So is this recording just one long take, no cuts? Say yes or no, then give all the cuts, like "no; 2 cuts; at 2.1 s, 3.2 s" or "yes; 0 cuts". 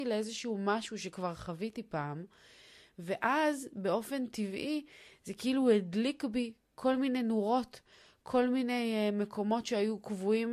yes; 0 cuts